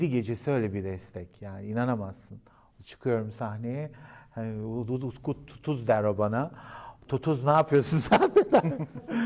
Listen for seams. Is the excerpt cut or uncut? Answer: uncut